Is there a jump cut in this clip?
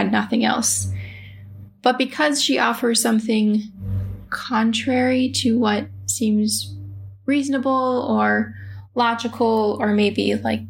no; 0 cuts

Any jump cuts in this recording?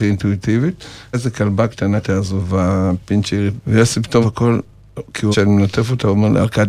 yes; 5 cuts; at 1.1 s, 2.0 s, 3.6 s, 4.2 s, 5.3 s

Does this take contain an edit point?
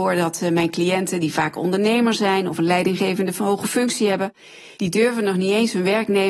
no; 0 cuts

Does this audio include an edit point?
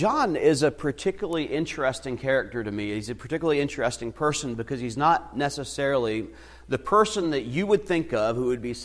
no; 0 cuts

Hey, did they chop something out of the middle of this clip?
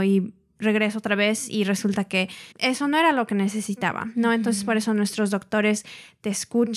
yes; 1 cut; at 2.5 s

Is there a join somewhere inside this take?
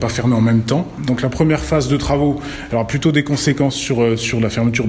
no; 0 cuts

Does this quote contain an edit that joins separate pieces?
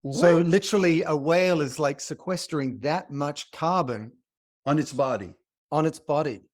no; 0 cuts

